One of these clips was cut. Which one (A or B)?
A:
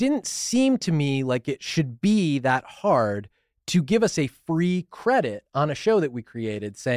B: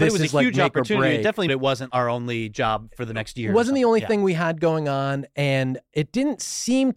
B